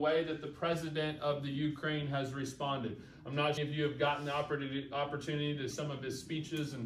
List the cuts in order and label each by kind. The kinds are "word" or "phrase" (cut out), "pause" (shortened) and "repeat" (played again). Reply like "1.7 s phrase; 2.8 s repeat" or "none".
3.6 s phrase; 5.7 s word